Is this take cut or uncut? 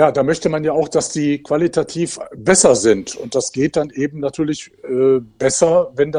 uncut